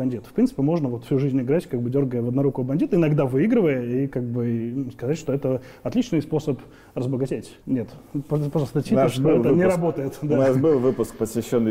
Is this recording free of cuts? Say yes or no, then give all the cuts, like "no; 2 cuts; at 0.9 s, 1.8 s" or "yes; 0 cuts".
no; 1 cut; at 7.6 s